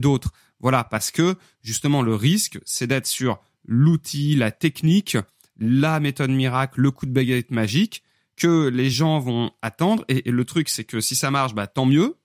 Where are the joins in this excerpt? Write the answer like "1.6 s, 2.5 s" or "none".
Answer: none